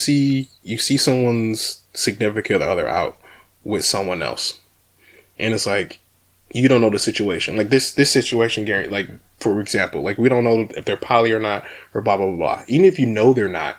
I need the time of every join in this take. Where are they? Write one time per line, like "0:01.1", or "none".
none